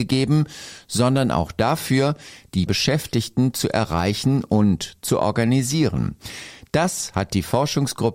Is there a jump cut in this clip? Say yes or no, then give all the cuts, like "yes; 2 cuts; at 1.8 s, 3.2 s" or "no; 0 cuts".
yes; 1 cut; at 2.7 s